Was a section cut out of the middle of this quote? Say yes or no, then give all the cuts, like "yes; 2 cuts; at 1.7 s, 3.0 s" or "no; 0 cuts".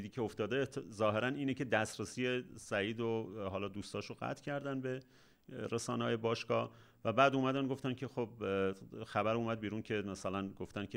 no; 0 cuts